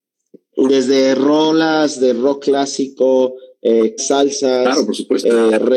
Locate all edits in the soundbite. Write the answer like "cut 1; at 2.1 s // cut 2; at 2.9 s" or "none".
cut 1; at 4.0 s